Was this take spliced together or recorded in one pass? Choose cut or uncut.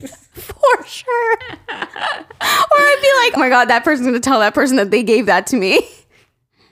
cut